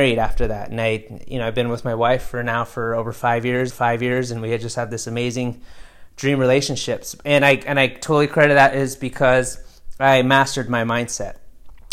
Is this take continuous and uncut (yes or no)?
no